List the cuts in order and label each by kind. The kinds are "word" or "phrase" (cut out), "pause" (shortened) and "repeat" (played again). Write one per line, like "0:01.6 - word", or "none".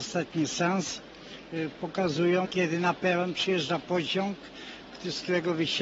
0:02.4 - word